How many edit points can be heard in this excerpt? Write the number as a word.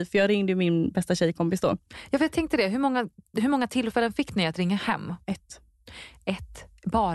zero